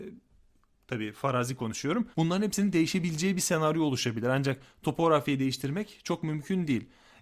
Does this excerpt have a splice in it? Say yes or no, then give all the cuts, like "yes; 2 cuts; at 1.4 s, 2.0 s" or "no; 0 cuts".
yes; 1 cut; at 2.1 s